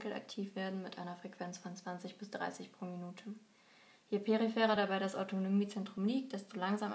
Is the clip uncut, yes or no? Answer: yes